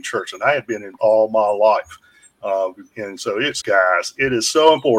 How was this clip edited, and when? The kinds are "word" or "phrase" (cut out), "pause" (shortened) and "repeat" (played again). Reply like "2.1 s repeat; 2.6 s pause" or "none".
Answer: 1.0 s word; 2.9 s word; 3.6 s word